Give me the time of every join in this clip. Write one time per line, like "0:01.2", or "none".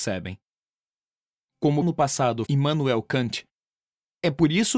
0:01.8
0:02.4